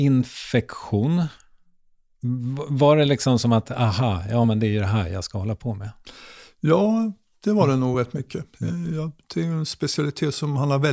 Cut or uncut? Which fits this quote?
uncut